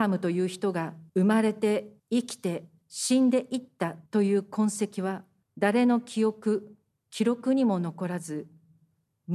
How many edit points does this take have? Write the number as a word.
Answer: six